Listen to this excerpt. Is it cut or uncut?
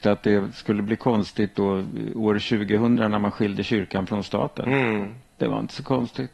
uncut